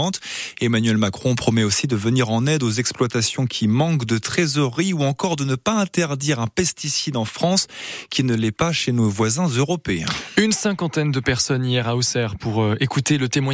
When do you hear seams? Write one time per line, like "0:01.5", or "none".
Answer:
none